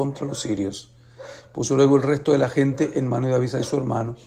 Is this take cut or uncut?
uncut